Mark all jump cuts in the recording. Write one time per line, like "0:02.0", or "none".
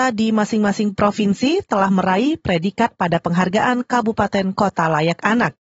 none